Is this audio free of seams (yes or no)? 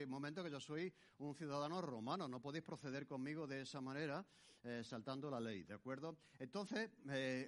yes